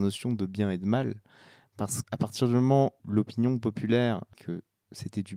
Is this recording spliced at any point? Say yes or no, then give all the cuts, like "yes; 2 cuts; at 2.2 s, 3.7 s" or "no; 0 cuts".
yes; 3 cuts; at 2.0 s, 3.0 s, 4.3 s